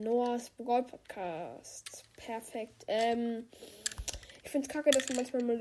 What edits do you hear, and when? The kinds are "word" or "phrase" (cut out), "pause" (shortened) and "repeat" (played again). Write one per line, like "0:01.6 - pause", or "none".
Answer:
none